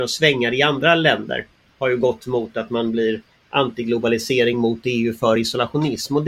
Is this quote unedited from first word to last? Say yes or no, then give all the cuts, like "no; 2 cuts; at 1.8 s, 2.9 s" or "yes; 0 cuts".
yes; 0 cuts